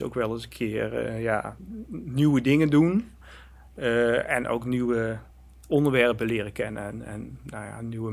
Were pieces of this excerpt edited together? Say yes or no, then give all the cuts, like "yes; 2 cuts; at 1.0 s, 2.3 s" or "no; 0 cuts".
no; 0 cuts